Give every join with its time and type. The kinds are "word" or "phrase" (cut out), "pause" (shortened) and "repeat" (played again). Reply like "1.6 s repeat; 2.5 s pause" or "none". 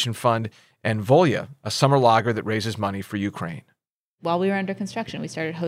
none